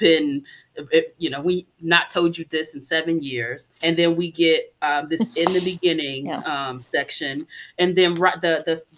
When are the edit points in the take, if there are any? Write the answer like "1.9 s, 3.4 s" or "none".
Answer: 3.8 s